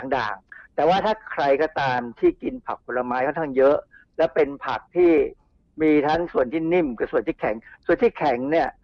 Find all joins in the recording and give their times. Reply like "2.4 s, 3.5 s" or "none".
none